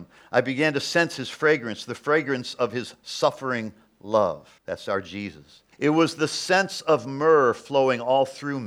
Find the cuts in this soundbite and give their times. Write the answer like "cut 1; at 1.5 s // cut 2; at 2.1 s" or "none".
cut 1; at 4.6 s // cut 2; at 5.7 s